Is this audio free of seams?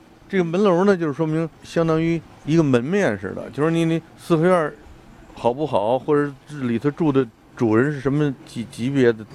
no; 1 cut; at 4.1 s

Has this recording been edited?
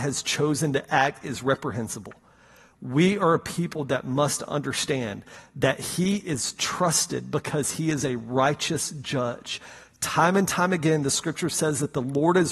no; 0 cuts

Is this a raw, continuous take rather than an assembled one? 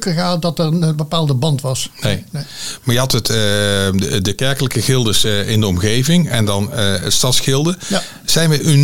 yes; 0 cuts

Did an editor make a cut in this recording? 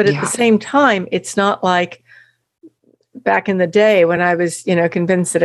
no; 0 cuts

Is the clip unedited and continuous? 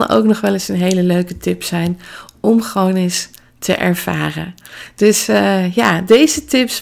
yes; 0 cuts

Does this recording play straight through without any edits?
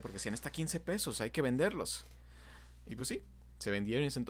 yes; 0 cuts

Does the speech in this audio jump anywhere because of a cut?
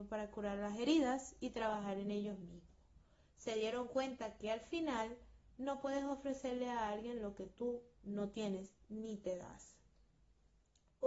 no; 0 cuts

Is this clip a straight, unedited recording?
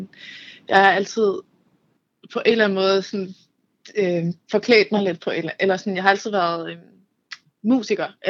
yes; 0 cuts

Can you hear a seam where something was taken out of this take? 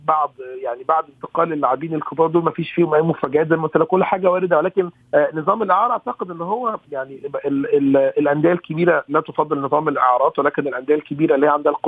yes; 1 cut; at 5.0 s

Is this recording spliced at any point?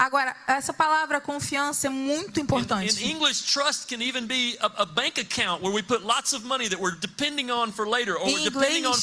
no; 0 cuts

